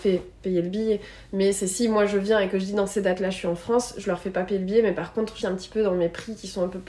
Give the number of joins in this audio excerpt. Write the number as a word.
one